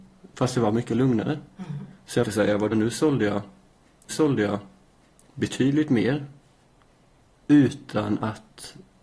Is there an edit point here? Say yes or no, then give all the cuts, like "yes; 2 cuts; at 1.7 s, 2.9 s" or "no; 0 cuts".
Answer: yes; 3 cuts; at 2.2 s, 2.7 s, 4.1 s